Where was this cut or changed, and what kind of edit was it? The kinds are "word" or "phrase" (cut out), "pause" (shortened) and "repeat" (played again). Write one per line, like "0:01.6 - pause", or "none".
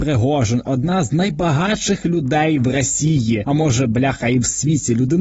none